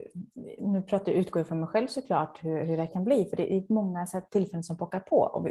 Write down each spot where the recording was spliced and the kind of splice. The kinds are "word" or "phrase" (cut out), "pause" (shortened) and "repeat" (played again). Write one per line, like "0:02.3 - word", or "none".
none